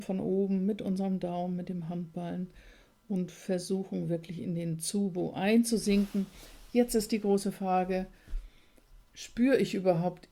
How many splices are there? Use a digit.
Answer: 0